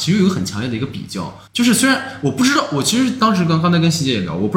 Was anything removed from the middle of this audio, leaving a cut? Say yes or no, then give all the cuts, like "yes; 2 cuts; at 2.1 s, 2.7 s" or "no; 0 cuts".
yes; 1 cut; at 1.5 s